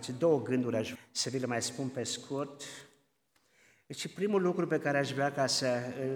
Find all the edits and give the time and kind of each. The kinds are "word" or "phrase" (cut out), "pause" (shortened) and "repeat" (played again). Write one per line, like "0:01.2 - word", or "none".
0:00.9 - word